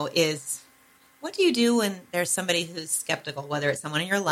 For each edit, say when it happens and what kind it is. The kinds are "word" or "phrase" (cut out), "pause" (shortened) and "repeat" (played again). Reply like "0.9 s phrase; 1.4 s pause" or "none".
none